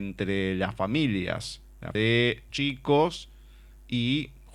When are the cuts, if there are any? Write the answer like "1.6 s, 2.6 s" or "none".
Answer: 1.9 s, 2.5 s